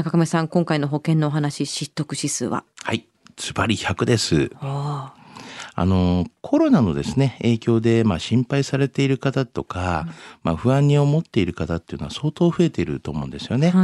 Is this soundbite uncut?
yes; 0 cuts

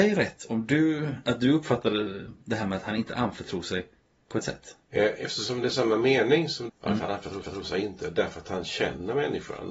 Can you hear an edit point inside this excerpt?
yes; 7 cuts; at 1.2 s, 4.0 s, 4.4 s, 4.8 s, 5.7 s, 6.7 s, 7.4 s

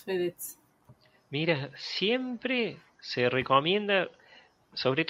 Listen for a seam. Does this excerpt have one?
no; 0 cuts

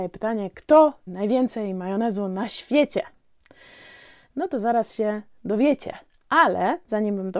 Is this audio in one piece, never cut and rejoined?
no; 1 cut; at 1.1 s

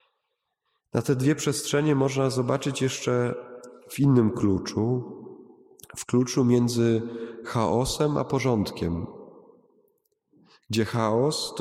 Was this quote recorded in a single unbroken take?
yes; 0 cuts

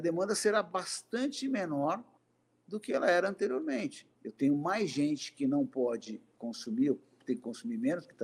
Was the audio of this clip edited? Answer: yes; 2 cuts; at 2.2 s, 4.1 s

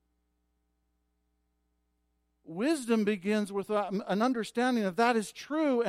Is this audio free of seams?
yes; 0 cuts

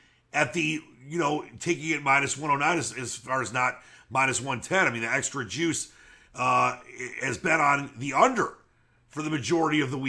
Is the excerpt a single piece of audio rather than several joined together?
yes; 0 cuts

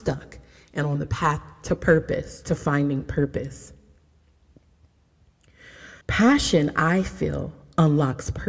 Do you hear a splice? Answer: yes; 1 cut; at 6.0 s

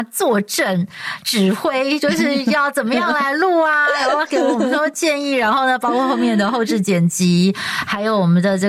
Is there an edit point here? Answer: no; 0 cuts

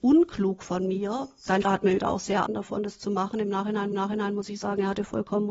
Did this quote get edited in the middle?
yes; 4 cuts; at 1.6 s, 2.0 s, 2.5 s, 3.9 s

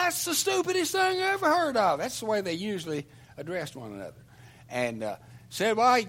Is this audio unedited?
yes; 0 cuts

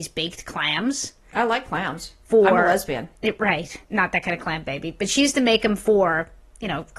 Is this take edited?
yes; 1 cut; at 3.8 s

